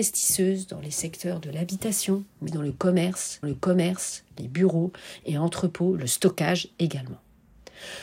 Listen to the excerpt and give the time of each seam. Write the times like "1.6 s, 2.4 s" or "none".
2.5 s, 3.4 s